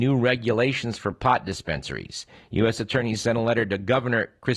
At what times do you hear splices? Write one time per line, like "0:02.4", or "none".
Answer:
0:02.4